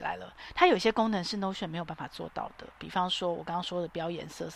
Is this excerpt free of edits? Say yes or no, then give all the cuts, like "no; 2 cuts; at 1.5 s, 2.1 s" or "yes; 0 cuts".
yes; 0 cuts